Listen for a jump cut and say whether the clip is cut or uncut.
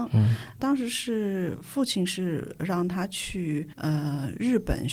cut